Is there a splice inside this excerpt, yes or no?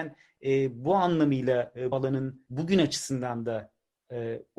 yes